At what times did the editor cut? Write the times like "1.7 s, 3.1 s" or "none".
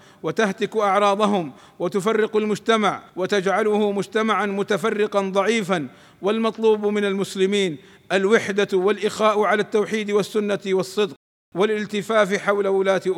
3.1 s